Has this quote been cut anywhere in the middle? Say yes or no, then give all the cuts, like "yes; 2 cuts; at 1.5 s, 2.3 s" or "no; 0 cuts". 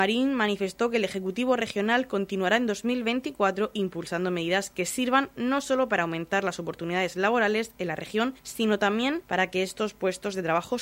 no; 0 cuts